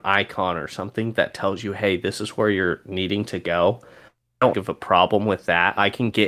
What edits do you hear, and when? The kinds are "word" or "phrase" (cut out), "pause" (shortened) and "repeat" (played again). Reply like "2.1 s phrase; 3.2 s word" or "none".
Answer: 4.5 s phrase